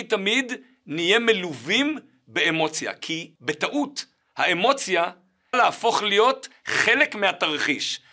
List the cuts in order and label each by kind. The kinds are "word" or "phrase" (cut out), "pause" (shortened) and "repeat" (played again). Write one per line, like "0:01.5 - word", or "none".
0:03.4 - pause
0:05.5 - word